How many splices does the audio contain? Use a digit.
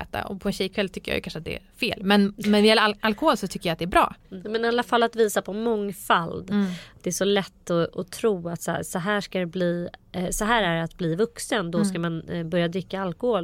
1